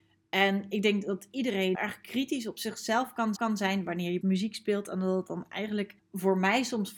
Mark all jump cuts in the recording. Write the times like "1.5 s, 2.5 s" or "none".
1.7 s, 3.4 s, 4.2 s, 6.0 s